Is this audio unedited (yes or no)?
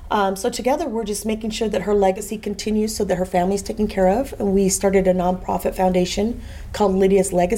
yes